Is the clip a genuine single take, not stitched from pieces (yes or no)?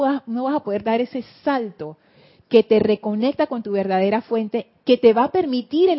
yes